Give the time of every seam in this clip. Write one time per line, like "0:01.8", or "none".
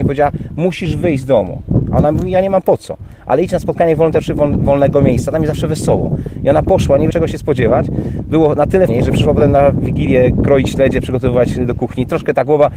0:07.1
0:08.9